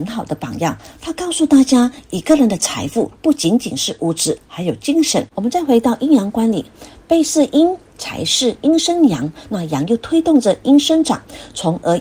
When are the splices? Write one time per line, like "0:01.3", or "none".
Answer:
0:05.3